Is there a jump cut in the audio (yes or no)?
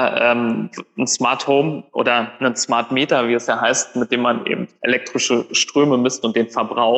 yes